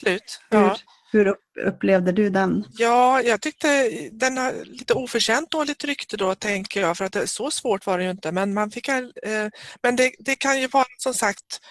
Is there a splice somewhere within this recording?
no; 0 cuts

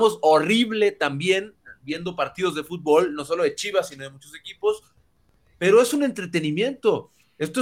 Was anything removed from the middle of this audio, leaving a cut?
no; 0 cuts

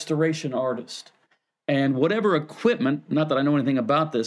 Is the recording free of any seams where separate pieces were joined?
yes; 0 cuts

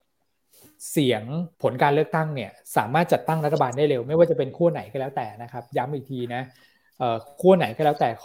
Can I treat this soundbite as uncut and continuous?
no; 1 cut; at 1.5 s

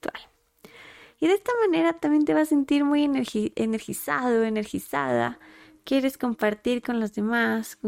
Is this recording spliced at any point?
no; 0 cuts

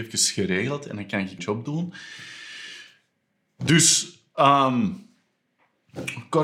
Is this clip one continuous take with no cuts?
no; 1 cut; at 1.4 s

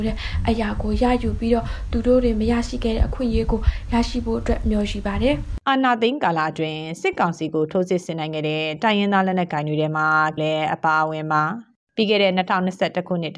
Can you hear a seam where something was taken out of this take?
yes; 2 cuts; at 10.4 s, 11.8 s

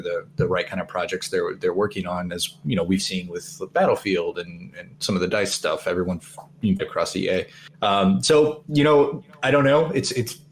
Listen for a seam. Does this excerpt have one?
yes; 4 cuts; at 3.0 s, 4.9 s, 6.8 s, 7.7 s

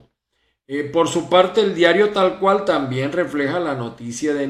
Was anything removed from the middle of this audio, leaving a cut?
no; 0 cuts

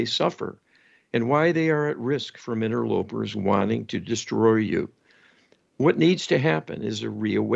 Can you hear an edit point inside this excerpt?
no; 0 cuts

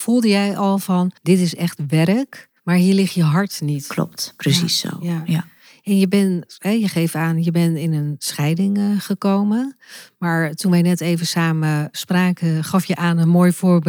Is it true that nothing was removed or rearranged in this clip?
no; 2 cuts; at 1.2 s, 2.6 s

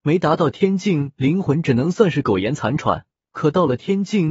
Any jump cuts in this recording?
yes; 1 cut; at 3.2 s

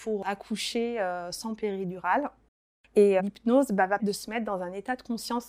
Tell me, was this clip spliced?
yes; 2 cuts; at 3.2 s, 4.0 s

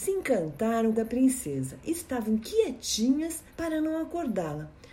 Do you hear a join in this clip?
yes; 2 cuts; at 0.9 s, 3.5 s

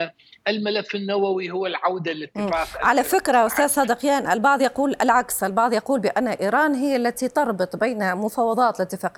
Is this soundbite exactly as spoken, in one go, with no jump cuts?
yes; 0 cuts

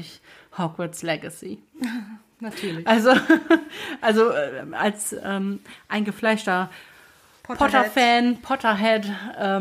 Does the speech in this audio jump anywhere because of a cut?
no; 0 cuts

